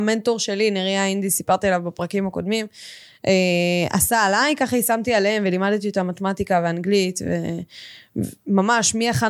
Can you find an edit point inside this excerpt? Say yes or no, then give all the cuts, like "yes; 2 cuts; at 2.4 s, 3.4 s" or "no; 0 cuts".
no; 0 cuts